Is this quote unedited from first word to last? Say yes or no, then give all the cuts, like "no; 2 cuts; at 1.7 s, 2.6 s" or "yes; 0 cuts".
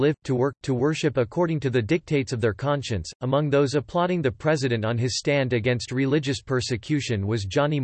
yes; 0 cuts